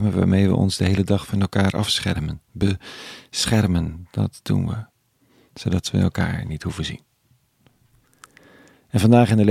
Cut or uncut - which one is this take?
uncut